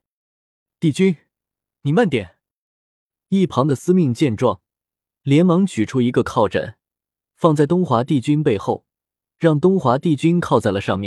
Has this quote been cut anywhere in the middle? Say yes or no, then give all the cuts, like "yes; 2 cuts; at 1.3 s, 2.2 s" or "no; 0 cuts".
no; 0 cuts